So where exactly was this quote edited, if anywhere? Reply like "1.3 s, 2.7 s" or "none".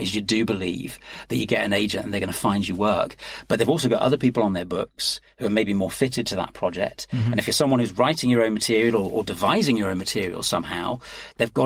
none